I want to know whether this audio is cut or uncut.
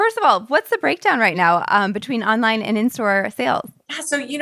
uncut